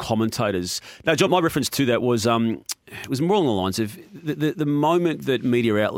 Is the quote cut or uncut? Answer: cut